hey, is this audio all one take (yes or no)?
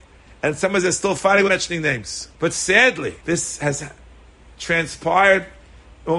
no